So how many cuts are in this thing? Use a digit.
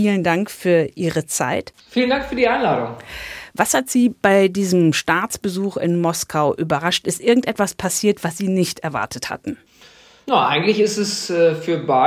0